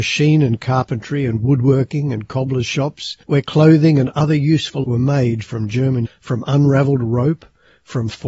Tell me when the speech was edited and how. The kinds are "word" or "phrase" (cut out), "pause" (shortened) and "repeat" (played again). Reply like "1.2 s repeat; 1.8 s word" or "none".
3.2 s pause; 4.8 s word; 6.1 s word